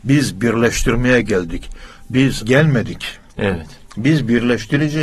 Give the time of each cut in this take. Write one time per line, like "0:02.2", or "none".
0:02.4